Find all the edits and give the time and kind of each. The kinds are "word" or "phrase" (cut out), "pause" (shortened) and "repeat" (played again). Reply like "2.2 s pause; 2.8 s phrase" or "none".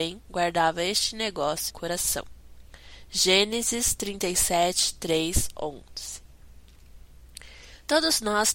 1.7 s phrase